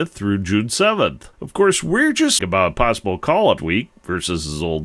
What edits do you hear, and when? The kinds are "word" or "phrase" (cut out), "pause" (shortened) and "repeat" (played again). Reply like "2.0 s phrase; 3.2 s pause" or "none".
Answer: 1.3 s pause; 2.4 s word; 3.6 s word